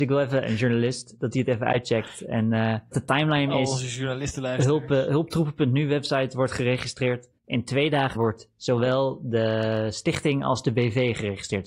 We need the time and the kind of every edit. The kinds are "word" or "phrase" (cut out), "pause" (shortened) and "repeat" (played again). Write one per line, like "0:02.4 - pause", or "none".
0:02.9 - word
0:07.4 - pause
0:08.1 - word